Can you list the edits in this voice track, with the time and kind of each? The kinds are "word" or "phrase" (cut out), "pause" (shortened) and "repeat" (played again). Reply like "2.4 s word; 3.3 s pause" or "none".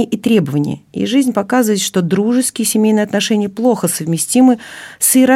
none